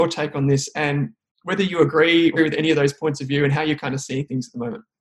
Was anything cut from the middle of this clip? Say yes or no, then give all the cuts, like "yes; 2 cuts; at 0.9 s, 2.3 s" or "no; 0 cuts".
yes; 1 cut; at 2.4 s